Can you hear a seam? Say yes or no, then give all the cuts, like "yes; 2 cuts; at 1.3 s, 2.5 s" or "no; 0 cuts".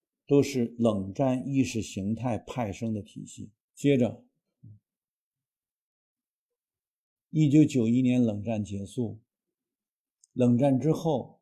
yes; 1 cut; at 3.6 s